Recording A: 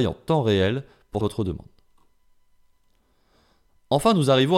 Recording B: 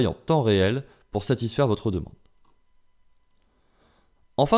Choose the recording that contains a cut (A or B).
A